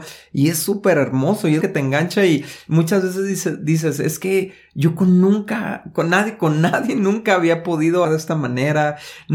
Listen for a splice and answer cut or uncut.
cut